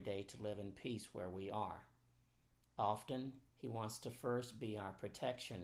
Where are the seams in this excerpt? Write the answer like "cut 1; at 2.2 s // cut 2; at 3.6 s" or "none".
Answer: cut 1; at 3.5 s

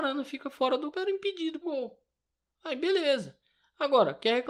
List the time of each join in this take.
cut 1; at 0.9 s // cut 2; at 1.6 s

